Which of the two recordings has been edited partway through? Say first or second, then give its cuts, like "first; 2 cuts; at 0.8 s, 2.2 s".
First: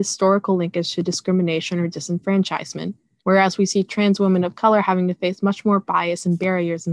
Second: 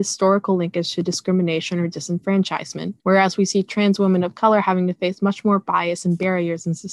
second; 1 cut; at 3.0 s